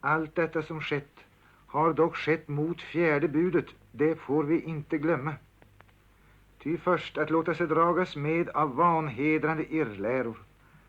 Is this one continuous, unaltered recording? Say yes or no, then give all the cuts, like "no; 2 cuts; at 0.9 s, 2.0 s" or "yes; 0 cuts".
yes; 0 cuts